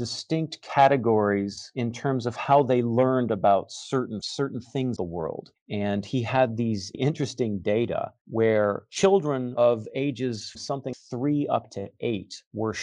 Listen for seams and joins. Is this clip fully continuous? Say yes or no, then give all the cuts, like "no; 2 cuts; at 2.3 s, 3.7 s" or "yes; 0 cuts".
no; 5 cuts; at 4.2 s, 5.0 s, 6.9 s, 10.6 s, 10.9 s